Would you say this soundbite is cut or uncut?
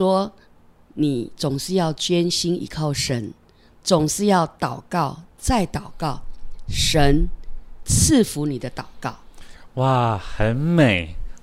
uncut